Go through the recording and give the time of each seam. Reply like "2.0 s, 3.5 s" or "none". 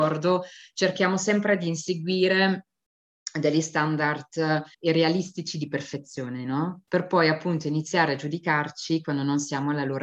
4.7 s, 6.9 s